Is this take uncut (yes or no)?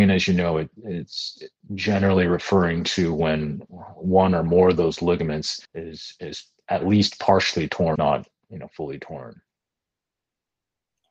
no